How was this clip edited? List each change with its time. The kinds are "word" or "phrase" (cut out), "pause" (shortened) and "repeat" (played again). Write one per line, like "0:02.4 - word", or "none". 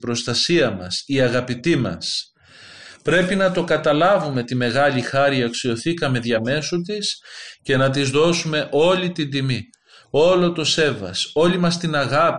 none